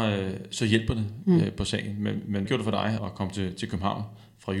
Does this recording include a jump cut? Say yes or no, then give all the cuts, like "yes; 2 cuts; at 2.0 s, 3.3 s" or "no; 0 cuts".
yes; 2 cuts; at 2.5 s, 3.0 s